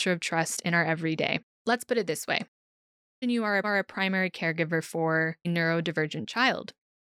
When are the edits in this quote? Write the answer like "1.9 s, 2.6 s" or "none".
1.5 s, 3.2 s, 3.6 s, 5.4 s

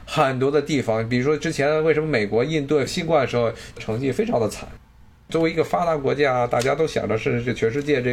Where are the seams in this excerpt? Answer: none

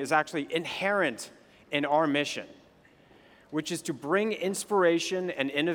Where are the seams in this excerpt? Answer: none

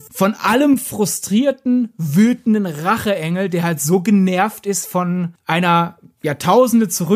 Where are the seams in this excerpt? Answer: none

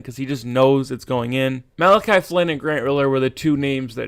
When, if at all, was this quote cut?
none

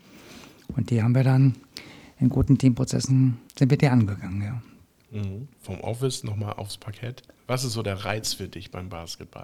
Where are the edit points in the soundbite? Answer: 3.5 s, 5.5 s, 7.3 s

